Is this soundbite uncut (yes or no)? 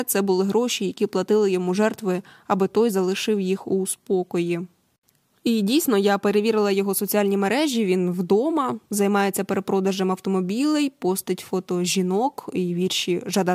yes